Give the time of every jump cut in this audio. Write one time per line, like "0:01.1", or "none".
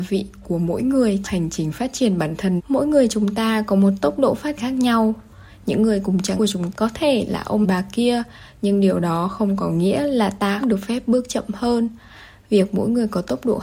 0:01.2
0:02.6
0:04.6
0:06.4
0:06.7
0:07.6
0:10.6